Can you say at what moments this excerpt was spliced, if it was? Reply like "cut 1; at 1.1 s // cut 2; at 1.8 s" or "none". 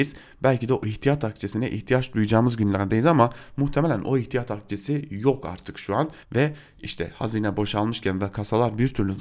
cut 1; at 6.2 s